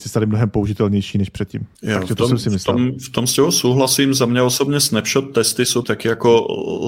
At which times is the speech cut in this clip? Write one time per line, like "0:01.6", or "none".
0:01.8
0:05.8

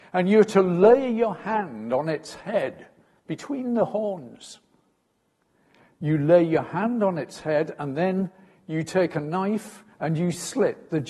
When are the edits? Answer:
0:09.9

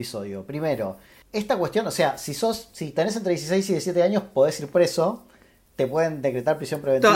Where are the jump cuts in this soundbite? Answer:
none

